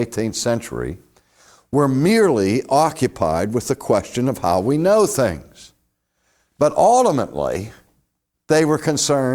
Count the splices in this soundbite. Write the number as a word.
zero